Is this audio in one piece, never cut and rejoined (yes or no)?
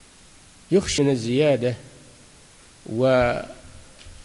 no